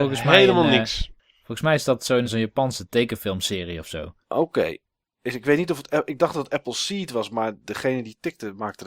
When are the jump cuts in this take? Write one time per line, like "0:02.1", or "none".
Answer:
0:02.2
0:04.2